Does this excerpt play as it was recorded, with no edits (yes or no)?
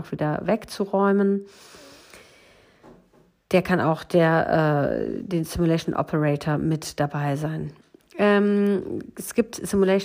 yes